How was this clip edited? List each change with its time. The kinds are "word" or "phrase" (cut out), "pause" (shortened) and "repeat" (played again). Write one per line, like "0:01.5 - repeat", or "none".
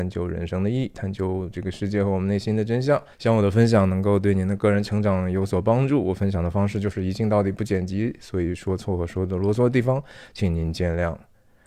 0:03.1 - pause